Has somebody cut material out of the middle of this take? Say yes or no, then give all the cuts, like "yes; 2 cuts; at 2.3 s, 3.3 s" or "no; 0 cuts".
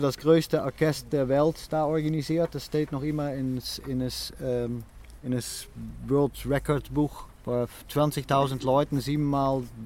yes; 1 cut; at 7.3 s